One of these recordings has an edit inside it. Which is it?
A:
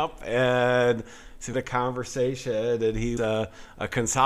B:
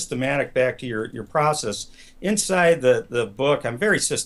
A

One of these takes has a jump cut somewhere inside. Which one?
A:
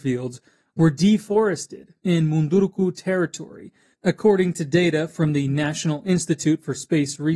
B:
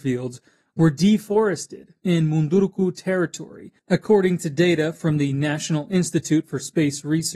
B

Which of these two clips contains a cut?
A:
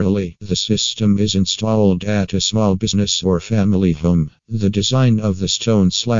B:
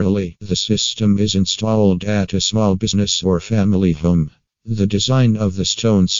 A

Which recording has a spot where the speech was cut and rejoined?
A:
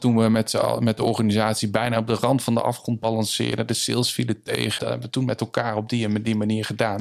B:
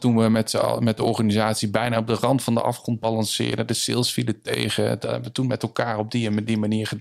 A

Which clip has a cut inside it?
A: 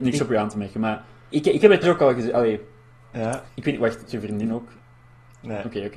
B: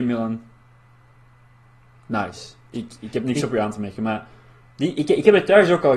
A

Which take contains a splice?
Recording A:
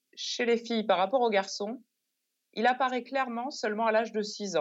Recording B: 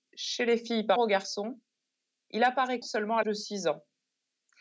B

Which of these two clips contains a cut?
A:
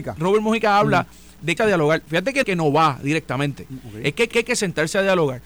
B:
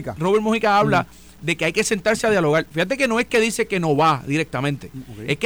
A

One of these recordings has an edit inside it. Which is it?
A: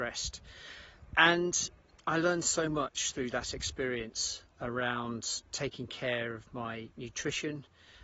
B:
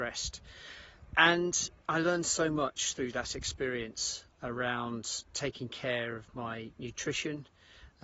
B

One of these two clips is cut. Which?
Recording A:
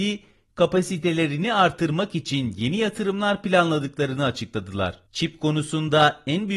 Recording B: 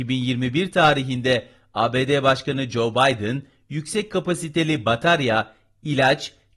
A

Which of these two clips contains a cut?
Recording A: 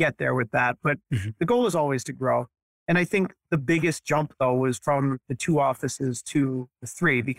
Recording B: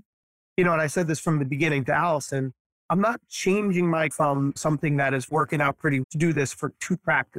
B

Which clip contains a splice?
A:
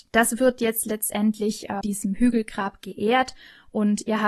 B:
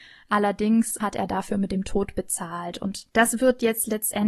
A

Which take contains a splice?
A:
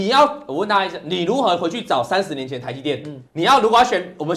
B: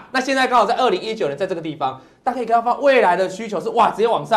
A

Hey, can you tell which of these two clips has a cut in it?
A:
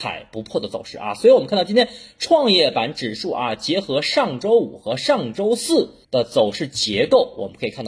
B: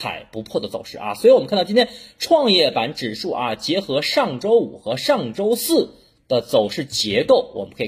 A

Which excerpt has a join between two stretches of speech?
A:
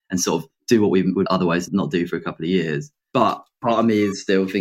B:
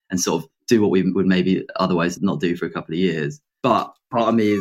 A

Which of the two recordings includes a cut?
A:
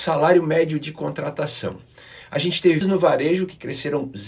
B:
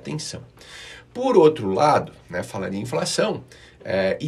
A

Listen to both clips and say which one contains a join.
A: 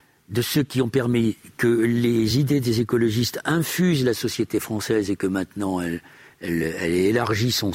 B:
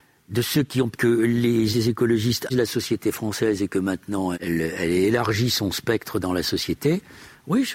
B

